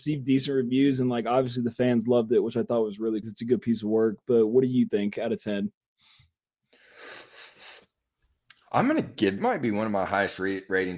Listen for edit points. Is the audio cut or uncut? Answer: cut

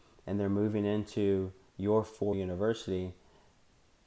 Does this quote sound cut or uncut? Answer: cut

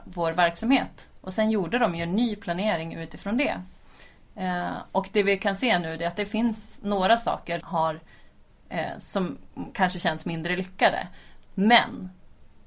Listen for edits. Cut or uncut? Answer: cut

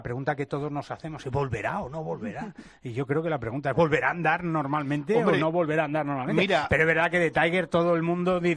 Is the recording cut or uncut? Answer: uncut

